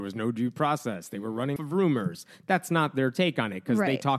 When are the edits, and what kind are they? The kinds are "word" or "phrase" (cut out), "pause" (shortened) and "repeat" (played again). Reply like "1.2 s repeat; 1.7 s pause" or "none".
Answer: 1.6 s word

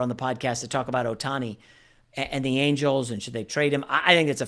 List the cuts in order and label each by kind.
none

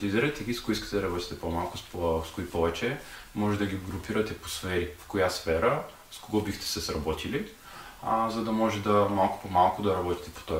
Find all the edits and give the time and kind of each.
none

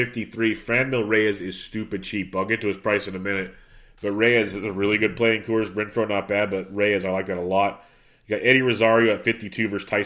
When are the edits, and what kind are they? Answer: none

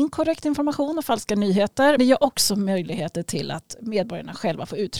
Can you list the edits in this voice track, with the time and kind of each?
2.0 s word

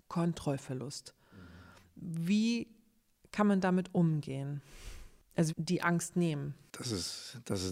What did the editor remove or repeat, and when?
5.5 s phrase

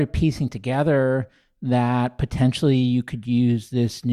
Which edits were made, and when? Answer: none

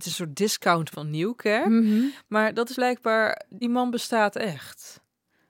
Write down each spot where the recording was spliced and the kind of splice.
0.9 s word; 2.7 s word; 3.6 s word

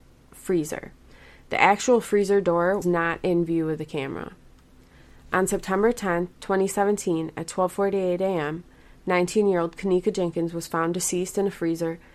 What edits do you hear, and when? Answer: 2.8 s word

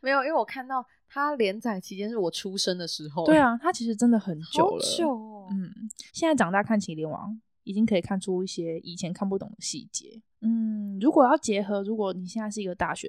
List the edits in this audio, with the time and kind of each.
6.1 s pause; 10.3 s pause

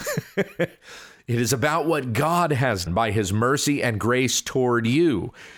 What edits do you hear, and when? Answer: 2.9 s word

